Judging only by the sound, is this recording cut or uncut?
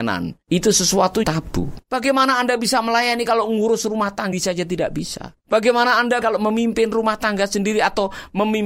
cut